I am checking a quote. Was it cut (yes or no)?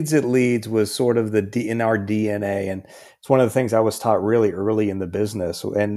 no